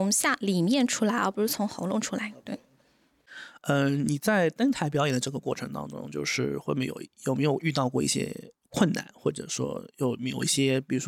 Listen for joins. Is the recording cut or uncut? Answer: cut